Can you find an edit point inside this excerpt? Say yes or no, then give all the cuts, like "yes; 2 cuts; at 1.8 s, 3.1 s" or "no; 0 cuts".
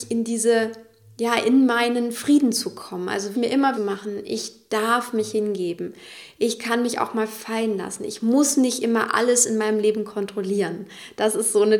yes; 2 cuts; at 3.3 s, 3.7 s